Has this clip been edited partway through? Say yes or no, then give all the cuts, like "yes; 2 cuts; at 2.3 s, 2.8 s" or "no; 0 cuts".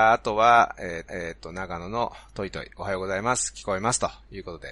yes; 1 cut; at 1.1 s